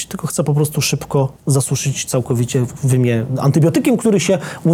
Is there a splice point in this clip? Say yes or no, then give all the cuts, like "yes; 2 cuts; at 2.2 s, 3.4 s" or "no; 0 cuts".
yes; 1 cut; at 1.4 s